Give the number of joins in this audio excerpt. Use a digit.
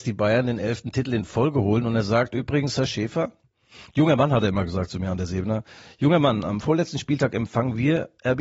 0